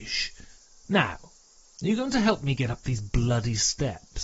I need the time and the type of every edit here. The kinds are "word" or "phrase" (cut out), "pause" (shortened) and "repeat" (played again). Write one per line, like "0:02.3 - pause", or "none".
none